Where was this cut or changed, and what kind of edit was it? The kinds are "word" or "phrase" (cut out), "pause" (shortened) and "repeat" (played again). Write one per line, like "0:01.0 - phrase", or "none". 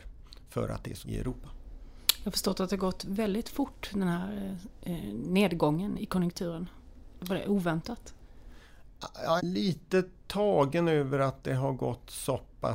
0:01.0 - word
0:06.0 - word
0:09.4 - word